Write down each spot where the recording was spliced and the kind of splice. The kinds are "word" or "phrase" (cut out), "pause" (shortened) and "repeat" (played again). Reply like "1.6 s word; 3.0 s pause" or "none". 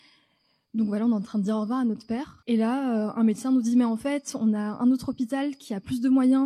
2.4 s pause